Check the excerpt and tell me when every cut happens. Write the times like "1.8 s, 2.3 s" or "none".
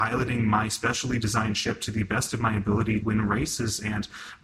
3.0 s

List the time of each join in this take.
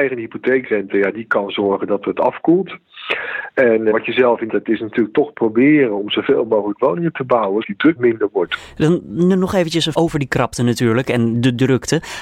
3.9 s, 4.5 s, 7.6 s, 8.0 s, 9.9 s

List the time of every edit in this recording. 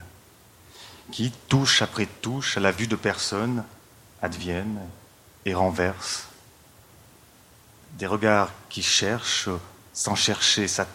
none

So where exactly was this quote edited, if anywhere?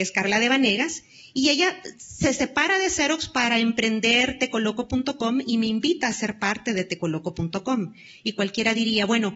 none

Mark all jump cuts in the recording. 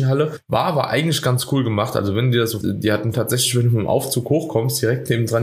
2.6 s, 3.1 s

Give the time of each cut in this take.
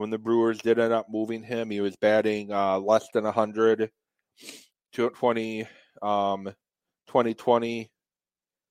none

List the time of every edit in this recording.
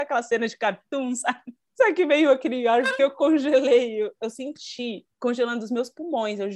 3.0 s

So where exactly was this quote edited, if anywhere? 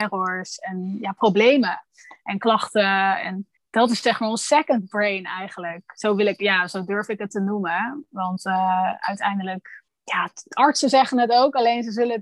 3.6 s, 9.9 s

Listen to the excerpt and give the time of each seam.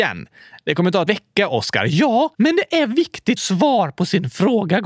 1.1 s, 2.3 s, 3.4 s

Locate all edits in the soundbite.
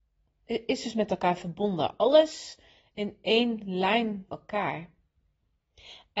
2.9 s, 4.3 s

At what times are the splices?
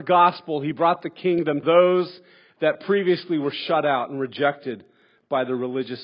1.6 s

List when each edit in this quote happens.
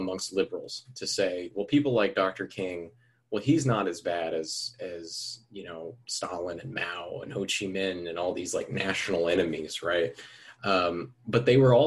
none

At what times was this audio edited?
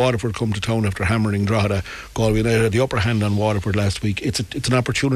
none

